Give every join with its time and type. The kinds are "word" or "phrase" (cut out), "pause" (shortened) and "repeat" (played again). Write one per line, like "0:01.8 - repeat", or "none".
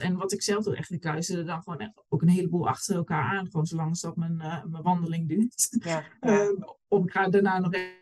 none